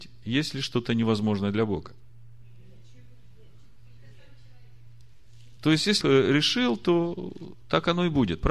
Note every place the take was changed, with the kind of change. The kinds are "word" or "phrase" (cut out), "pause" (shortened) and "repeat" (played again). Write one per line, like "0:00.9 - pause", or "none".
0:06.0 - word